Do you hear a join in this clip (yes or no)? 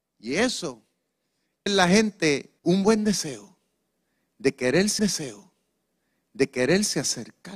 yes